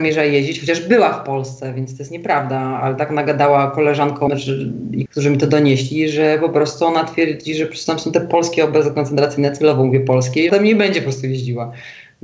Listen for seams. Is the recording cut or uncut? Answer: cut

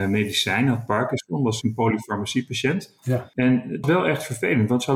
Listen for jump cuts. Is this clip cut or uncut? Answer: cut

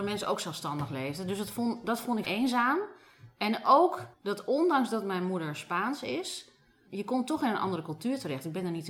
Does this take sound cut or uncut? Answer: cut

